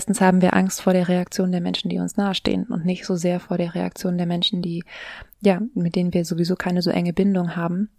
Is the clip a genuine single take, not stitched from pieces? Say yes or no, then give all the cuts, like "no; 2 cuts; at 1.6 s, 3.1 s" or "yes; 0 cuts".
no; 1 cut; at 5.3 s